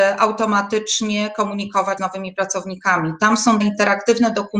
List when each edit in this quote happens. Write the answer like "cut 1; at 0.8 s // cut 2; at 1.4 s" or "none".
cut 1; at 2.0 s // cut 2; at 3.6 s